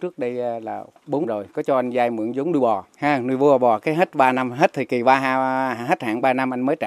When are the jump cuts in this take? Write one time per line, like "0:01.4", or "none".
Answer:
0:01.2
0:02.9